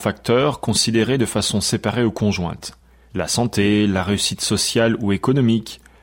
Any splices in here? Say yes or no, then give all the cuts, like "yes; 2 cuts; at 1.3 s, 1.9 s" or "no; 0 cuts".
no; 0 cuts